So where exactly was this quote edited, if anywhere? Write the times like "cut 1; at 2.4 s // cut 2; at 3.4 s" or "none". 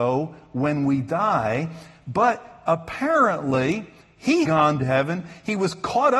cut 1; at 4.5 s // cut 2; at 4.8 s